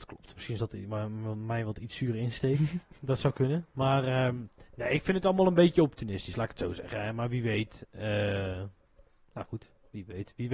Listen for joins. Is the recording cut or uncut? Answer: uncut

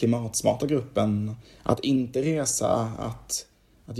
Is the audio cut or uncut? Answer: uncut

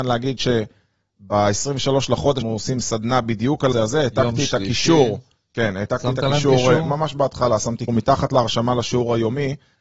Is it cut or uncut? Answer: cut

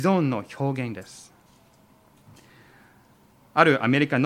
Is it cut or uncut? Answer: uncut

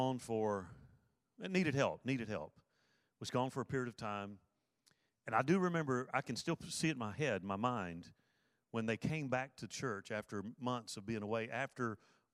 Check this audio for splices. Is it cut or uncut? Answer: uncut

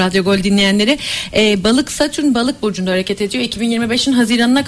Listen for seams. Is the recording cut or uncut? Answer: uncut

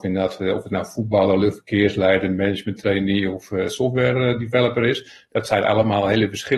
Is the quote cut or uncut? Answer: uncut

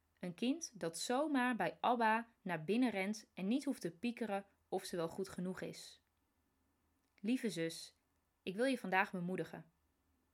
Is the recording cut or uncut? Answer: uncut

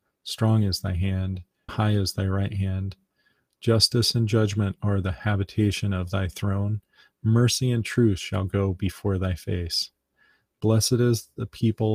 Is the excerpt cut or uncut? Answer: cut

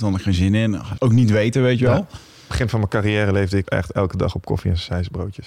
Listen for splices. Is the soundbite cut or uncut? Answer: cut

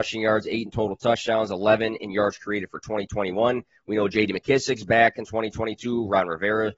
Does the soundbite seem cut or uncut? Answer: uncut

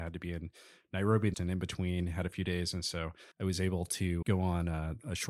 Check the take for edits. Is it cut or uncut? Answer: cut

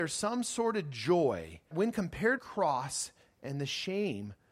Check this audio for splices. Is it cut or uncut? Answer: cut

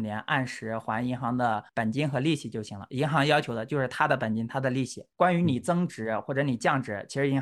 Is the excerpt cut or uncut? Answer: cut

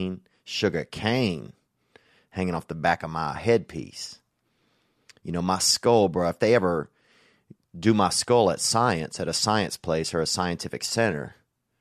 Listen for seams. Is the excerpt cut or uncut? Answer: uncut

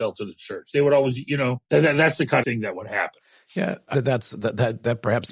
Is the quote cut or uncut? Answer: cut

